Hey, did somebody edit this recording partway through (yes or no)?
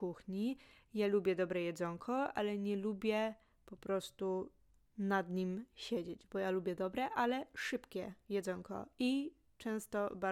no